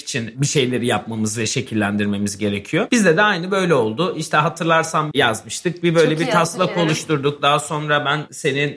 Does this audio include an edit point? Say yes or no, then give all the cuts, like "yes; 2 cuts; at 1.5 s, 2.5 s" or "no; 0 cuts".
yes; 1 cut; at 5.1 s